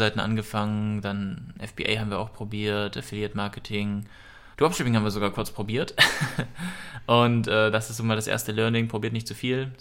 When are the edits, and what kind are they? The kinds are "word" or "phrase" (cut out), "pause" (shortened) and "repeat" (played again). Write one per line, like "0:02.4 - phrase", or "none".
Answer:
0:04.5 - pause